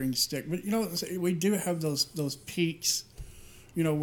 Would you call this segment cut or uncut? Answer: uncut